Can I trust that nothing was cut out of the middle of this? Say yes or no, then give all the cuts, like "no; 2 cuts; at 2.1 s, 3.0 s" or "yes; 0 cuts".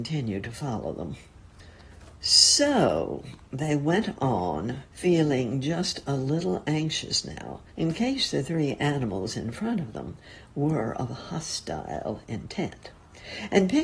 no; 2 cuts; at 4.9 s, 7.7 s